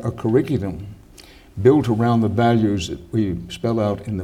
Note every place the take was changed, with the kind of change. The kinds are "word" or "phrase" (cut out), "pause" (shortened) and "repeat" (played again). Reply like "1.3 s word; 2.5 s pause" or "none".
none